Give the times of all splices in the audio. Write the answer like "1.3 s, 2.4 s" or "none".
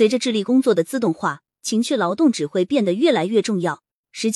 none